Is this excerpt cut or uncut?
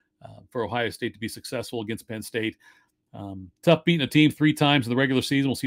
uncut